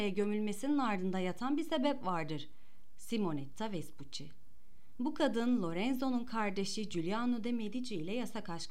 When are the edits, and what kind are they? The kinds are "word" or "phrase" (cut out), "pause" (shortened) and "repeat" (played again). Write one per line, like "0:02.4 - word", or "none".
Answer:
none